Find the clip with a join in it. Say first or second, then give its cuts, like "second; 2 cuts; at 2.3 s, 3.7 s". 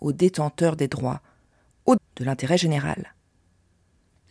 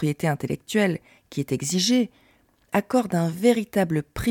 first; 1 cut; at 2.0 s